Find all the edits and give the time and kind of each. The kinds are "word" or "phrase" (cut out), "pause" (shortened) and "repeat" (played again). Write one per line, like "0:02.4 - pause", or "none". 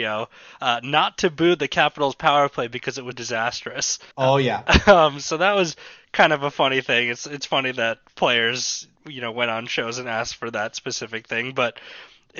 0:03.1 - word
0:04.1 - pause
0:09.0 - pause